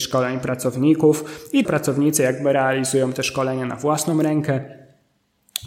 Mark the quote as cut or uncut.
cut